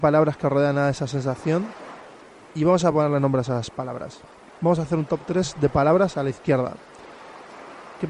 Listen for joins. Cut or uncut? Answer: uncut